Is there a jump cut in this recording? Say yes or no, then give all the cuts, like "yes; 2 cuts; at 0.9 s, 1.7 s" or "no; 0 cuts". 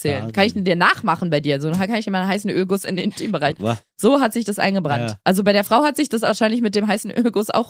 yes; 1 cut; at 3.5 s